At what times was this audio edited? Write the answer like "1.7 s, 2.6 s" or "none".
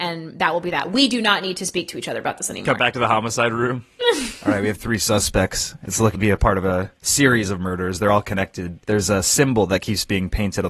6.1 s, 7.0 s, 8.8 s